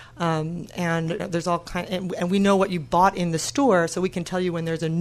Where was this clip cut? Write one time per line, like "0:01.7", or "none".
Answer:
0:01.2